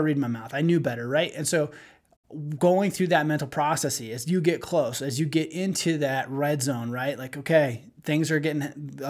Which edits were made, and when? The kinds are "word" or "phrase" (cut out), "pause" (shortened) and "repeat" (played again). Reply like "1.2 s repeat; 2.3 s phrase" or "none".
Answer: none